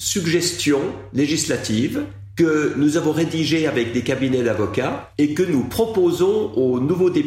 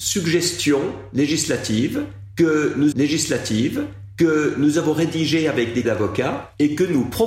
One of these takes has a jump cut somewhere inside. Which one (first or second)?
second